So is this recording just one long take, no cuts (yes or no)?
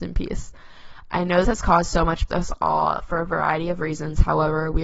no